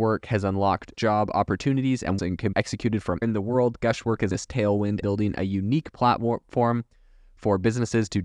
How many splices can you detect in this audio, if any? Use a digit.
6